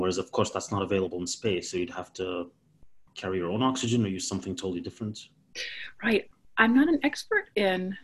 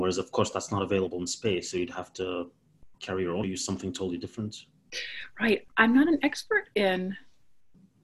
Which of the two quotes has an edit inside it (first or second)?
second